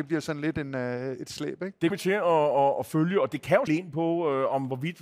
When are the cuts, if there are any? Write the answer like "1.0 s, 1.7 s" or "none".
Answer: 1.9 s, 3.7 s